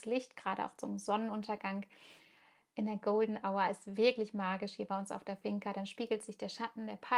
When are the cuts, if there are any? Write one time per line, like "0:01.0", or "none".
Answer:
none